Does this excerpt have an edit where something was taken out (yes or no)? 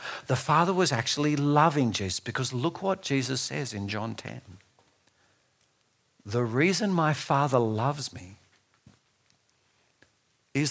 no